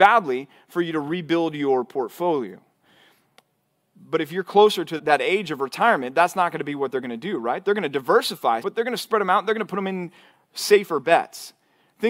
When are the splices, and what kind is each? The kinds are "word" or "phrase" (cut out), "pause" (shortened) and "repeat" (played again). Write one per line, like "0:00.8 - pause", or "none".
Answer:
0:05.0 - word
0:08.6 - word